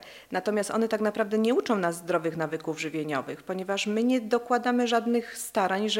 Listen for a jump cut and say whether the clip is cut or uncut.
uncut